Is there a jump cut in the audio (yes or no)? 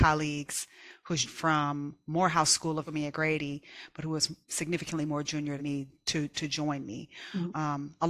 yes